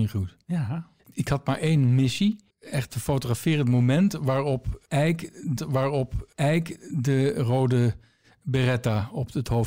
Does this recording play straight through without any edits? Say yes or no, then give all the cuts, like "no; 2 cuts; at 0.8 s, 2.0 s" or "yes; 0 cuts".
no; 3 cuts; at 1.0 s, 2.5 s, 5.6 s